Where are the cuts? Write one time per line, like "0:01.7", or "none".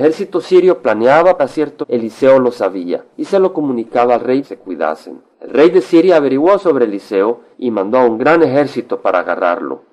0:01.4
0:01.8
0:03.1
0:04.4
0:05.3
0:07.5